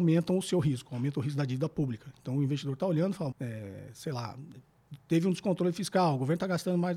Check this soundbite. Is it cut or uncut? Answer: cut